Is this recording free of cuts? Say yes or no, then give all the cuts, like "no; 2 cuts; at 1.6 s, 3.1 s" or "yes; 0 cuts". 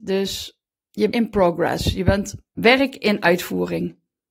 no; 2 cuts; at 1.1 s, 2.6 s